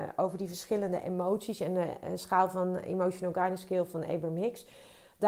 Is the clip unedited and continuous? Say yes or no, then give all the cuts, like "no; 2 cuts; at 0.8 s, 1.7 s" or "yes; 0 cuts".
yes; 0 cuts